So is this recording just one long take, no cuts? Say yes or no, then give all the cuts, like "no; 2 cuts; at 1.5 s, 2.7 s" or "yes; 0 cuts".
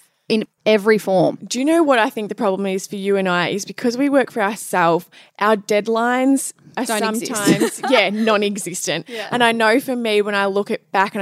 yes; 0 cuts